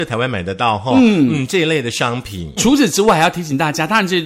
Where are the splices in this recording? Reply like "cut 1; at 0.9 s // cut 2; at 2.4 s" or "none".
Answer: cut 1; at 2.6 s